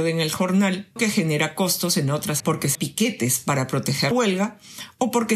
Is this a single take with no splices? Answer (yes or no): no